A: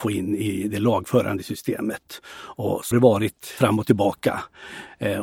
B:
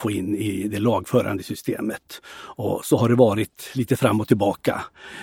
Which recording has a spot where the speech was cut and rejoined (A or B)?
A